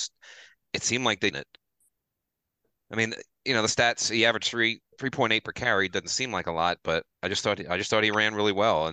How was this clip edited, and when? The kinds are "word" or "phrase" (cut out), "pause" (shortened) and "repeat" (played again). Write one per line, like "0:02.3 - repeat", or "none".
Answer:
0:01.3 - phrase
0:07.1 - pause